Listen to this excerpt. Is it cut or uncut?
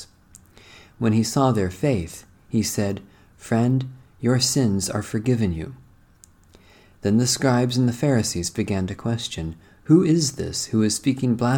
uncut